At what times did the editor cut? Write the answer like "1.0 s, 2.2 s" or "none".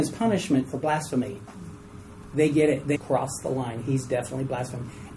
2.9 s